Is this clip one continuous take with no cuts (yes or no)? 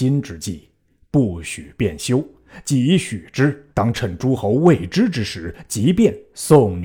no